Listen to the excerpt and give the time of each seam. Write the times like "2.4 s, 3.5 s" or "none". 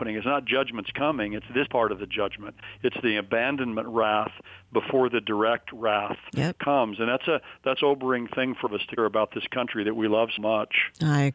1.7 s, 7.8 s, 8.7 s, 9.0 s, 10.4 s